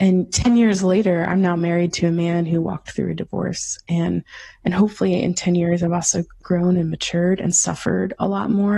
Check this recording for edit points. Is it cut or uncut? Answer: uncut